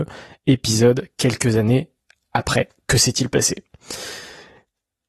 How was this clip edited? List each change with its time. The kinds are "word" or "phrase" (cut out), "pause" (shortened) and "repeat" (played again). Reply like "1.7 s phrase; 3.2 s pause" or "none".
none